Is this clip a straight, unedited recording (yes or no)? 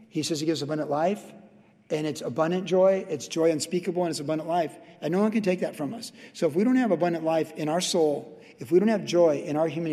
yes